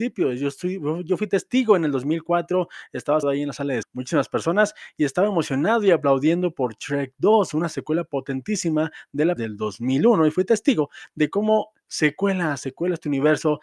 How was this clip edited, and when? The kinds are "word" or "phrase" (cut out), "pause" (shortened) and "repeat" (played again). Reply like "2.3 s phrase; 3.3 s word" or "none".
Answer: 3.2 s word; 3.8 s phrase; 9.4 s word